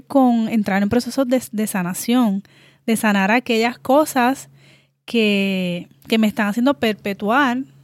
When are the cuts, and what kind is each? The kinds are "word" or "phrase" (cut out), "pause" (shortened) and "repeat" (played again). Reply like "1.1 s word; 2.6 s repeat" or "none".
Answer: none